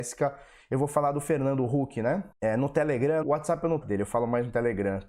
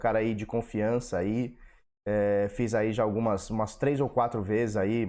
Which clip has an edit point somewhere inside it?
first; 3 cuts; at 2.3 s, 3.2 s, 3.8 s

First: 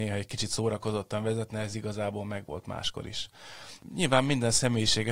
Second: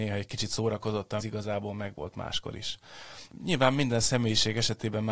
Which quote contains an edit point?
second; 1 cut; at 1.2 s

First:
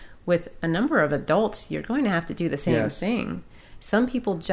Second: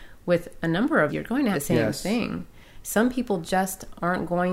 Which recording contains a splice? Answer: second; 2 cuts; at 1.1 s, 1.5 s

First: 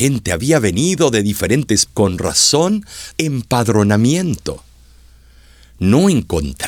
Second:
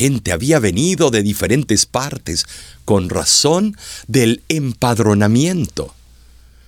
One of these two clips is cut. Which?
first; 2 cuts; at 1.9 s, 3.1 s

